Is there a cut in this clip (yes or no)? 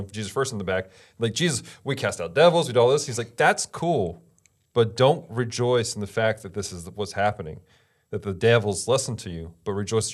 no